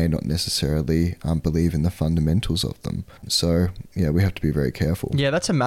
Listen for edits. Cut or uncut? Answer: cut